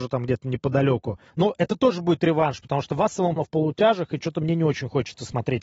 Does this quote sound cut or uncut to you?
cut